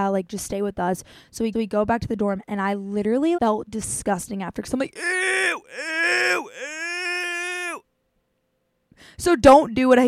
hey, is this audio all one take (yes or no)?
no